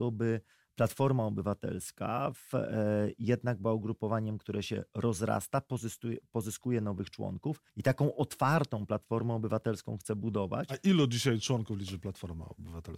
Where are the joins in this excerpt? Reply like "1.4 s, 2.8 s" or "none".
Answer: 7.7 s